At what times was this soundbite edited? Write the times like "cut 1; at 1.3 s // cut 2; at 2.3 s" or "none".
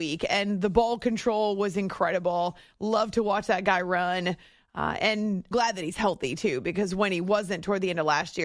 cut 1; at 5.5 s